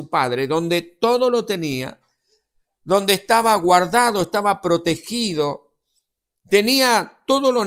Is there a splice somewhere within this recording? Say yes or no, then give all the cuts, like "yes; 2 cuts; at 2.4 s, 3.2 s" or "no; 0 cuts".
no; 0 cuts